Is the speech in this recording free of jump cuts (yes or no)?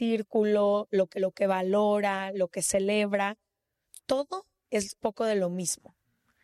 no